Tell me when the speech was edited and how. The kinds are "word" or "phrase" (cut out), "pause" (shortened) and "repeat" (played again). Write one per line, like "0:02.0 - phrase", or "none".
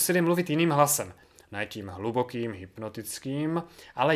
none